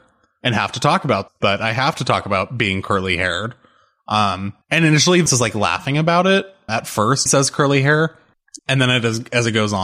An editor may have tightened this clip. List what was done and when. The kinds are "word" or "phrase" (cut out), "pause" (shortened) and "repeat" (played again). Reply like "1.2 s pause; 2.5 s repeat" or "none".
1.3 s word; 4.6 s pause; 5.3 s word; 6.7 s word; 7.3 s phrase; 8.6 s pause